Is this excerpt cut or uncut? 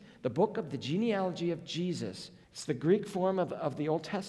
cut